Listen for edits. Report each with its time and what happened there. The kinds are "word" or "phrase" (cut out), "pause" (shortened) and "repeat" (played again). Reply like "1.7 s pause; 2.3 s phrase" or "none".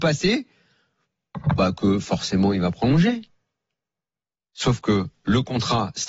none